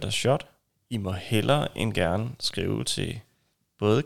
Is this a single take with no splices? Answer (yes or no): yes